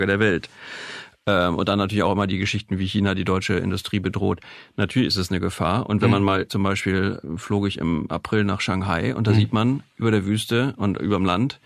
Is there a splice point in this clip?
no; 0 cuts

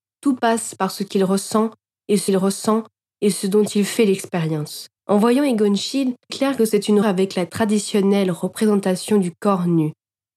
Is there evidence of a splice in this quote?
yes; 4 cuts; at 2.3 s, 5.0 s, 6.3 s, 7.0 s

